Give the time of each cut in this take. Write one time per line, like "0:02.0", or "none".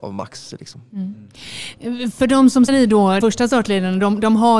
0:02.7
0:03.2